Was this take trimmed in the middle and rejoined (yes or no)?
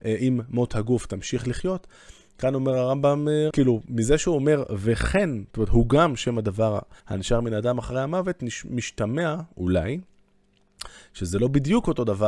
yes